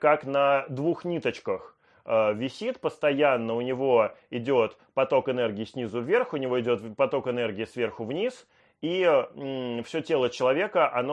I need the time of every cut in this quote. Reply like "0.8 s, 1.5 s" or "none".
none